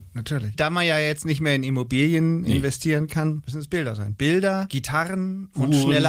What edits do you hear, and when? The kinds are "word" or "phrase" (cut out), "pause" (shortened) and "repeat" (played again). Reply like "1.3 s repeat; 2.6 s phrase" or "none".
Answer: none